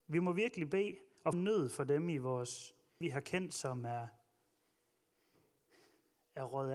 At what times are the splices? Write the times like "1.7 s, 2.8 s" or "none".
1.3 s, 3.0 s

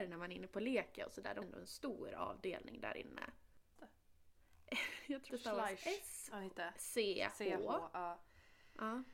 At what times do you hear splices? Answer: 1.4 s, 3.8 s, 5.3 s

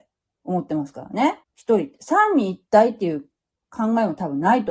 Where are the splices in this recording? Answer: 1.4 s

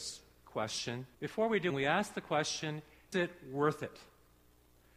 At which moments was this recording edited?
1.1 s, 1.7 s, 3.1 s

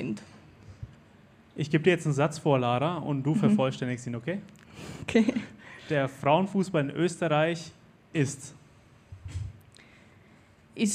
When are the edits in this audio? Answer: none

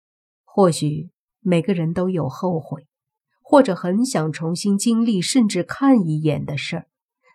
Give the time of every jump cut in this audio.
none

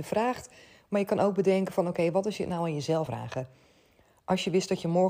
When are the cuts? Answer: 3.1 s

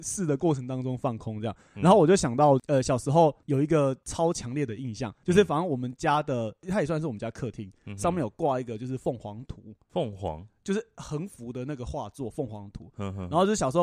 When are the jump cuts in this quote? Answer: none

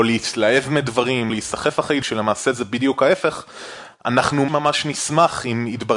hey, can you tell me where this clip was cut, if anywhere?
1.3 s, 2.0 s, 4.5 s

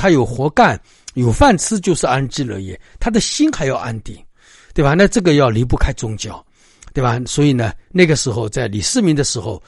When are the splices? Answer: none

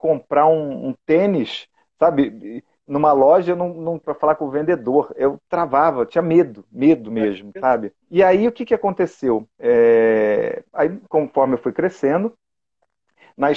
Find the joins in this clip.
4.0 s, 8.0 s, 9.5 s

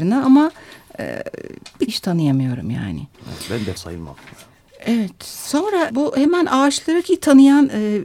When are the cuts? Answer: 1.9 s, 3.8 s, 5.9 s, 7.0 s

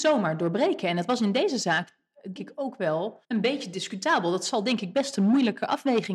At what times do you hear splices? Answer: 2.4 s, 3.2 s

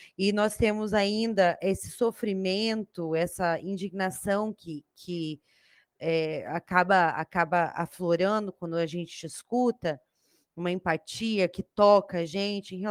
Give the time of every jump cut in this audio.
none

